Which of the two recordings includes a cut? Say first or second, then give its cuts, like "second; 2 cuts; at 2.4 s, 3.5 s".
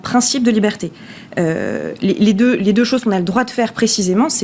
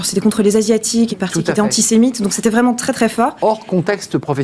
second; 1 cut; at 1.1 s